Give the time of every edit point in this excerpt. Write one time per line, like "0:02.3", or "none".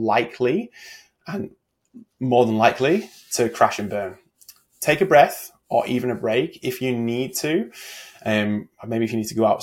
none